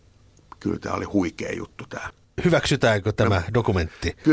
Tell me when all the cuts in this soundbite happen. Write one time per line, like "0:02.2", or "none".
0:02.2

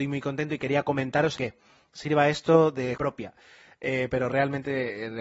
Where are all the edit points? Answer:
0:01.4
0:03.0
0:04.1

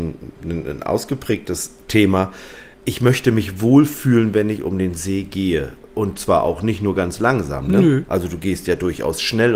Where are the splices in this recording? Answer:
0:02.7

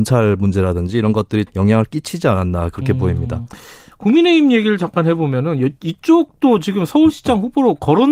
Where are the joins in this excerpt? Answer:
0:01.5

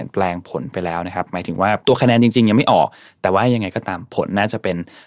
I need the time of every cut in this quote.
0:01.8

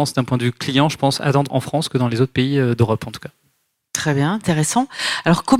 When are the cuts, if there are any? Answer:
0:01.5

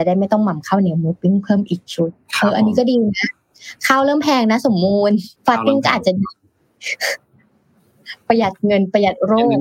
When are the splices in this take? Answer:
0:05.4

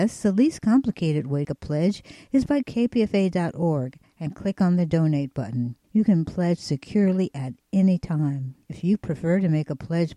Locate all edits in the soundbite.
0:01.4
0:02.6
0:05.8
0:08.6

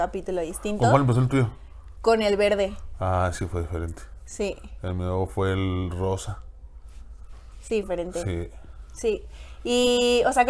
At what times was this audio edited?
0:07.8

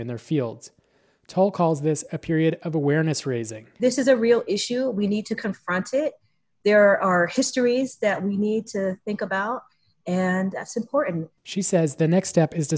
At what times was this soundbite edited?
0:10.5

